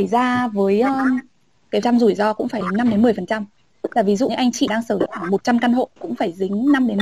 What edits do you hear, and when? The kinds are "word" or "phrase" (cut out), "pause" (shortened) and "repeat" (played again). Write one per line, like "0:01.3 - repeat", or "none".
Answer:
0:01.8 - word
0:02.6 - word
0:04.3 - word
0:04.7 - word
0:05.1 - word
0:06.0 - word